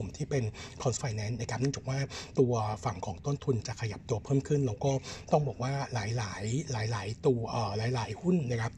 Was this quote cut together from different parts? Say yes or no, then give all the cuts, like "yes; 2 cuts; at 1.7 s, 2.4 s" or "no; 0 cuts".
yes; 1 cut; at 1.0 s